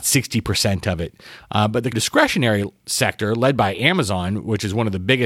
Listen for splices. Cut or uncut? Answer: cut